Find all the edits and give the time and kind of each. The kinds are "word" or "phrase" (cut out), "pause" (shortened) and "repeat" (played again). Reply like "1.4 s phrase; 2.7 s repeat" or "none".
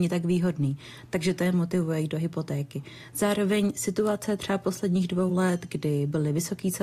none